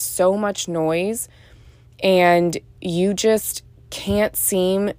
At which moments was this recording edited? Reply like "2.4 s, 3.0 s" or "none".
none